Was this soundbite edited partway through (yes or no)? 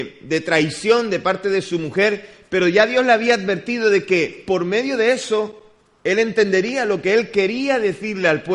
no